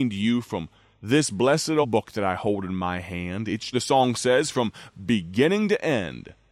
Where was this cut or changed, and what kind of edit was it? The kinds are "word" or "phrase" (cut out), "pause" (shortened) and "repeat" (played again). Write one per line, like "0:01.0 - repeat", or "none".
0:01.8 - word
0:03.7 - word